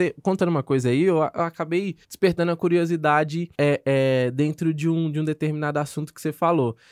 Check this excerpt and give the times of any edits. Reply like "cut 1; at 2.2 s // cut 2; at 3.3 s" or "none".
cut 1; at 2.0 s // cut 2; at 3.5 s